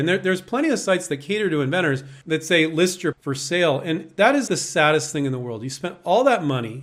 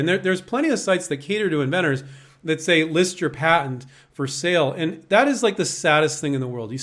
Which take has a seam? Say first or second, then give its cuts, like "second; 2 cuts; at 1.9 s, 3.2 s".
first; 3 cuts; at 2.2 s, 3.1 s, 4.5 s